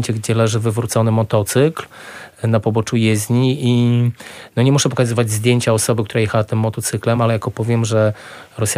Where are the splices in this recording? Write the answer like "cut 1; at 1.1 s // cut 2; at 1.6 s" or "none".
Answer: none